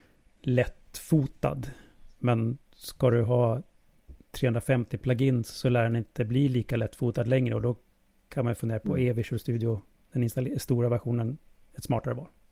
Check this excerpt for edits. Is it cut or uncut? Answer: uncut